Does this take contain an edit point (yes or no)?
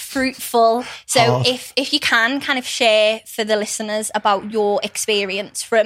no